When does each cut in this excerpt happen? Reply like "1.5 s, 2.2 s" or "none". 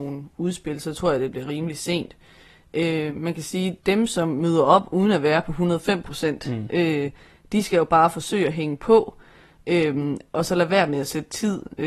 3.8 s